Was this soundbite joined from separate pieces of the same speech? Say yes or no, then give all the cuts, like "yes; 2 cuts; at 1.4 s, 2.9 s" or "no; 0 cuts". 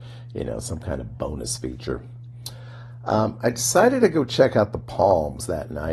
no; 0 cuts